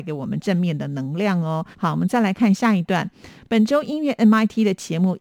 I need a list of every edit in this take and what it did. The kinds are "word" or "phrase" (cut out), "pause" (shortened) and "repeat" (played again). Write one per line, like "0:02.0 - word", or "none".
0:01.7 - pause